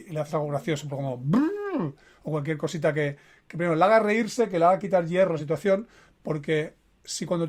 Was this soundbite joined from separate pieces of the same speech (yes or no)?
no